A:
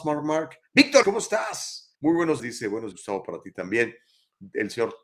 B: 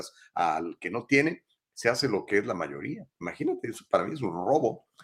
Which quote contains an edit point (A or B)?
A